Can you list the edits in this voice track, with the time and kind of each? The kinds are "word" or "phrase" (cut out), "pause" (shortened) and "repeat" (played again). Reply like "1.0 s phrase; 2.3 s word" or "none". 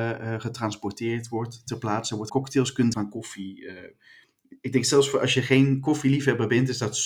2.3 s phrase; 2.9 s phrase